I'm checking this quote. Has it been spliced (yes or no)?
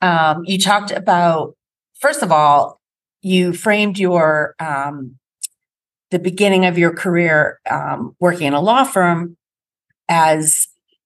no